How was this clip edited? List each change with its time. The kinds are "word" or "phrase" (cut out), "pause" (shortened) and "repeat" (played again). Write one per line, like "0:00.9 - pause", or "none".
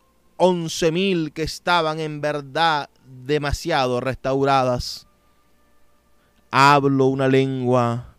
none